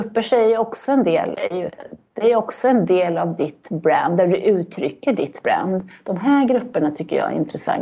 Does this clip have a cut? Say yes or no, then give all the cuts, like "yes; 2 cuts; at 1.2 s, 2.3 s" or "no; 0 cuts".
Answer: yes; 1 cut; at 1.3 s